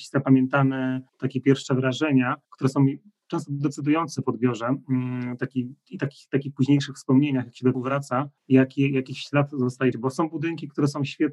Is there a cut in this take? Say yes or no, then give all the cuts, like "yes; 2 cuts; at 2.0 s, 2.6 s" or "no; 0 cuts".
yes; 5 cuts; at 1.1 s, 2.4 s, 7.7 s, 8.4 s, 9.9 s